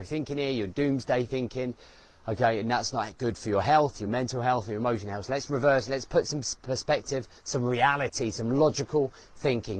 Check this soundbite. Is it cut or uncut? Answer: uncut